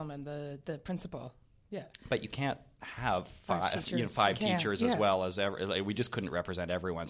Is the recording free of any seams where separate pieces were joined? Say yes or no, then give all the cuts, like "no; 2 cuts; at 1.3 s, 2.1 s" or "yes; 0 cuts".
yes; 0 cuts